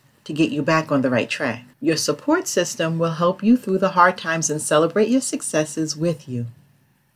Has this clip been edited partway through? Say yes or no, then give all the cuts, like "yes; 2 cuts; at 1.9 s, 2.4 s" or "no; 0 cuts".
yes; 1 cut; at 1.7 s